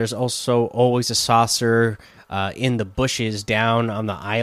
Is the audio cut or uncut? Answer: uncut